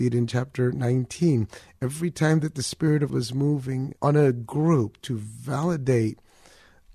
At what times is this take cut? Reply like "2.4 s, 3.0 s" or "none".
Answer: 3.1 s, 4.0 s, 5.0 s

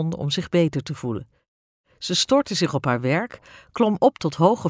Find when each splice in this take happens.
none

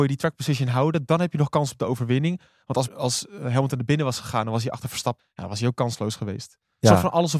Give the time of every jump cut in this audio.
2.9 s, 5.2 s

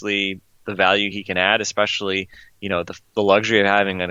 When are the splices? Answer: none

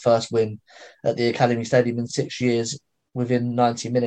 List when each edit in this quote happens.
none

